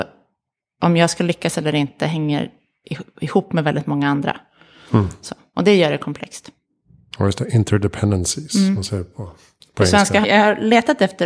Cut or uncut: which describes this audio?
cut